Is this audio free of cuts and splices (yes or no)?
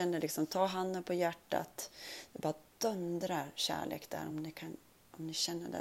yes